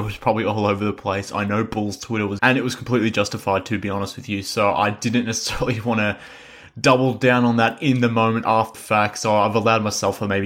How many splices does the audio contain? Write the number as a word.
three